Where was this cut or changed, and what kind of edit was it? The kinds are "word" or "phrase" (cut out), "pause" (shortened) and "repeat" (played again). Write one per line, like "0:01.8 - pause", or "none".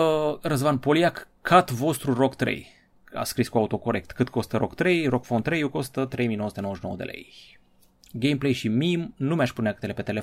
none